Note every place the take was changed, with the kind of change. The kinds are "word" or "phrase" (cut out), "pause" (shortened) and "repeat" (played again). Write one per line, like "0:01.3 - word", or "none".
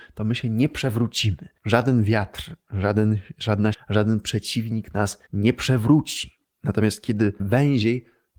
0:01.6 - pause
0:03.7 - word
0:05.3 - pause
0:06.5 - pause
0:07.4 - word